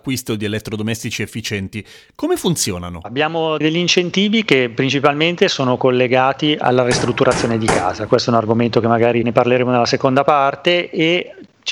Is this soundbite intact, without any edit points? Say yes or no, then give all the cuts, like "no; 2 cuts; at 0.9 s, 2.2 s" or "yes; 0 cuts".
no; 1 cut; at 8.1 s